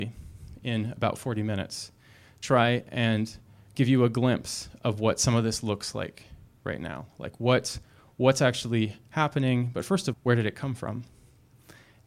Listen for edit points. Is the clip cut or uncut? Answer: cut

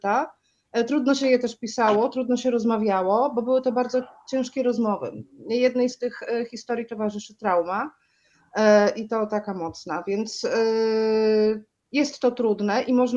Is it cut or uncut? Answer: uncut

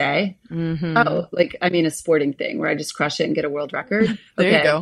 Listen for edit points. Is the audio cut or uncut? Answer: uncut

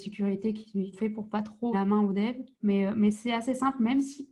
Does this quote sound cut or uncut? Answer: cut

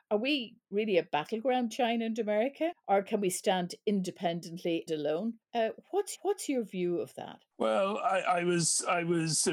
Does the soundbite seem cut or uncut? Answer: cut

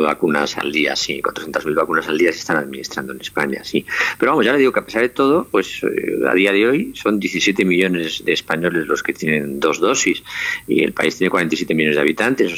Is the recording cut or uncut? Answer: uncut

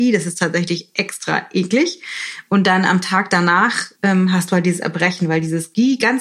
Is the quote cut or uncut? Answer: cut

